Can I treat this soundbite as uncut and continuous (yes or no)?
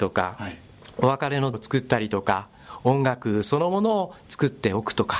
no